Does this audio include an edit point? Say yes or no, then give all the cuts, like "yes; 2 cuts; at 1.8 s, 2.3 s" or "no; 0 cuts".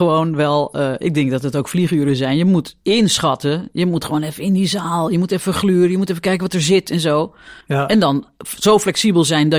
yes; 2 cuts; at 2.8 s, 7.6 s